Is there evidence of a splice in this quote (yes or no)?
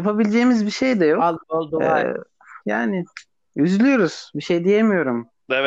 yes